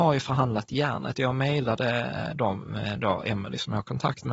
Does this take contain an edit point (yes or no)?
no